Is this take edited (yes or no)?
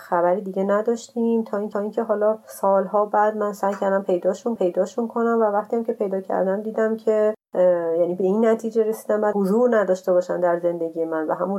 yes